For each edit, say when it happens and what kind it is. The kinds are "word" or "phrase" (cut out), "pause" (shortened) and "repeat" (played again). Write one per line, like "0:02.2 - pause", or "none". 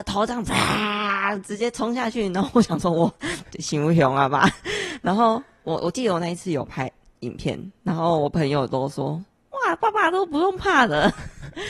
none